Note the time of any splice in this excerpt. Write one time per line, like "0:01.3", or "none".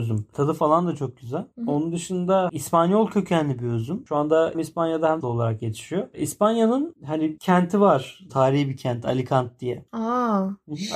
0:02.5
0:04.5
0:05.2
0:07.4
0:08.3

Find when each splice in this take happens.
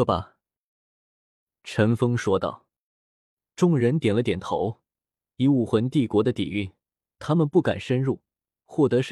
none

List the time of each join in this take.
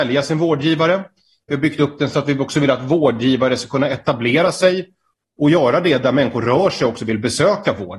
none

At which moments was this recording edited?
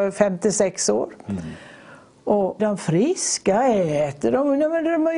0:02.6

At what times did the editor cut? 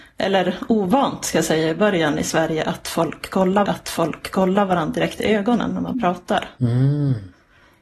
0:03.7

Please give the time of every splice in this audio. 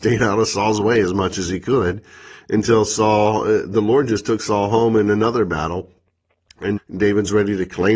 0:06.8

